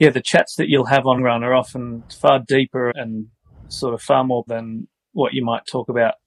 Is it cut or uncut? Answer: cut